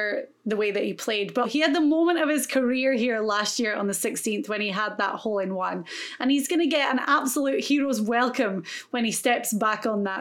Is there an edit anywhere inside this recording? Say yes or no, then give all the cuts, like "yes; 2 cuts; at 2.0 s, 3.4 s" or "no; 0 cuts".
yes; 1 cut; at 1.4 s